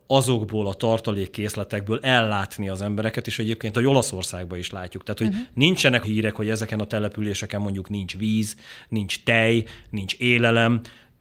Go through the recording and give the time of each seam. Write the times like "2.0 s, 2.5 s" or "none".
3.7 s, 6.0 s